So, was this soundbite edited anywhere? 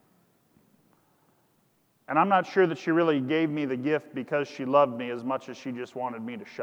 no; 0 cuts

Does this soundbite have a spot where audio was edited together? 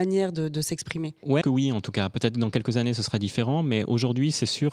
yes; 1 cut; at 1.4 s

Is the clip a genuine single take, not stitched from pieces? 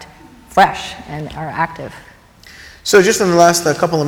yes; 0 cuts

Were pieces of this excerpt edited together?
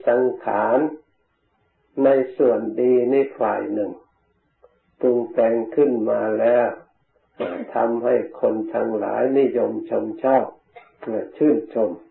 no; 0 cuts

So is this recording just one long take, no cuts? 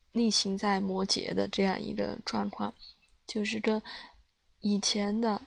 yes; 0 cuts

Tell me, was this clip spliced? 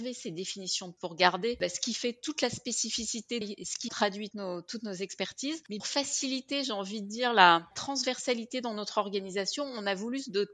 yes; 5 cuts; at 1.0 s, 3.4 s, 3.9 s, 4.3 s, 5.8 s

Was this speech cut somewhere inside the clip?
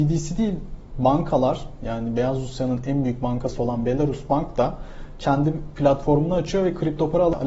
no; 0 cuts

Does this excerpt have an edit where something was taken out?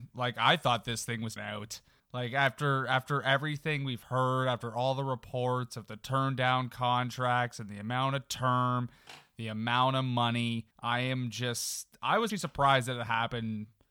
yes; 4 cuts; at 1.4 s, 2.0 s, 10.7 s, 12.3 s

